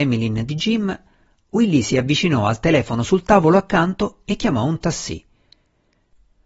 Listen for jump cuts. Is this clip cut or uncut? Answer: uncut